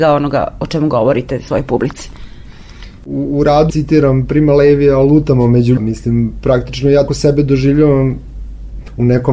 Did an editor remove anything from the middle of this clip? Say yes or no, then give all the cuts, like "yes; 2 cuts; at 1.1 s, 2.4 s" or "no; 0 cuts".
yes; 3 cuts; at 3.7 s, 5.8 s, 7.1 s